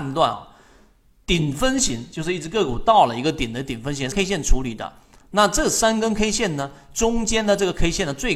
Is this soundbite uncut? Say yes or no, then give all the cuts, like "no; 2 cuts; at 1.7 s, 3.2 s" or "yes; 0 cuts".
no; 1 cut; at 4.1 s